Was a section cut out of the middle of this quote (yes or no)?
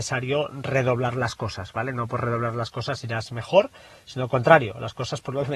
no